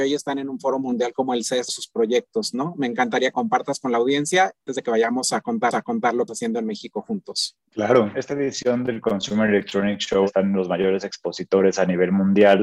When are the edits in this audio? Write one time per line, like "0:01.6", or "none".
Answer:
0:01.7
0:03.3
0:04.7
0:05.7
0:06.3